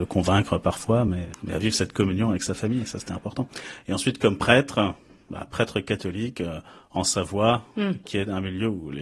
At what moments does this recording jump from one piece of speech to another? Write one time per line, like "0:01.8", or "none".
none